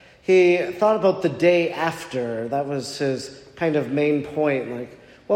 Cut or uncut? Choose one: uncut